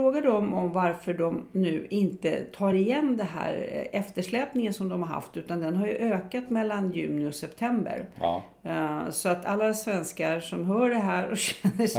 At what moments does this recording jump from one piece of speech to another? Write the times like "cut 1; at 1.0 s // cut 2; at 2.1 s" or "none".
none